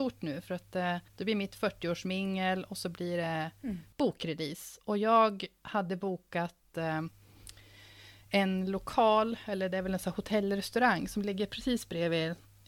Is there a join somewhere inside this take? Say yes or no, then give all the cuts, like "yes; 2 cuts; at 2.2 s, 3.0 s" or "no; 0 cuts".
yes; 1 cut; at 1.1 s